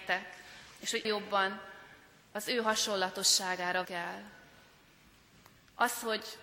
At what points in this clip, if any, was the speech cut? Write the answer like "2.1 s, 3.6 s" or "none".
1.0 s, 3.8 s